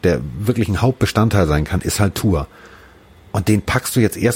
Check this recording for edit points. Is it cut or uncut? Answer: uncut